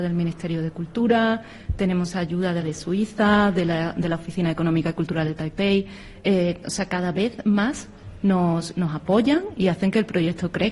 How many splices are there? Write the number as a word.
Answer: one